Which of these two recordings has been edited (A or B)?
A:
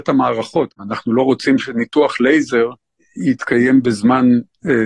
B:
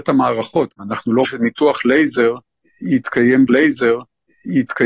B